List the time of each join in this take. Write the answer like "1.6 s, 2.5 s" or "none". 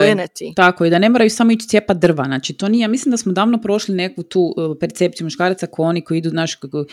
none